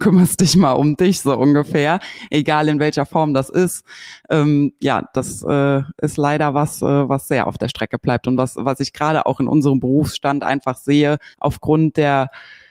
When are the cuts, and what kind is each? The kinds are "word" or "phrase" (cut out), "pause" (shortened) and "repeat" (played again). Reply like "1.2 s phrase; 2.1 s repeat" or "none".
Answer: 11.3 s pause